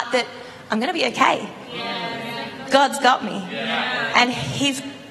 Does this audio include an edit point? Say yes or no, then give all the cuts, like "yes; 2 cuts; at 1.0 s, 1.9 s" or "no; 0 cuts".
yes; 1 cut; at 2.7 s